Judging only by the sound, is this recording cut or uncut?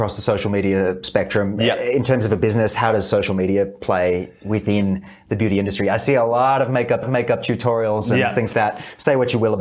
cut